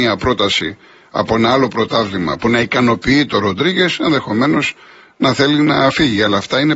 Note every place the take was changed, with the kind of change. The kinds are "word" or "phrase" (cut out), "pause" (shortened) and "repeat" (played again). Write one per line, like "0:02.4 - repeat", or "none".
none